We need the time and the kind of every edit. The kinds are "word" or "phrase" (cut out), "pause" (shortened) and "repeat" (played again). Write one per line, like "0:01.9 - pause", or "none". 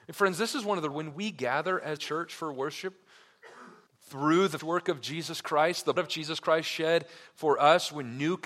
0:00.9 - phrase
0:02.0 - word
0:03.9 - pause
0:04.6 - word
0:06.0 - word